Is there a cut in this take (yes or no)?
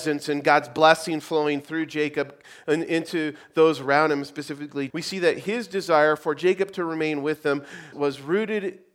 yes